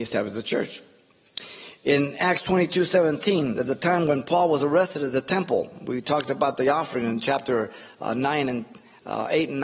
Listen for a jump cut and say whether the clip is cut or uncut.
uncut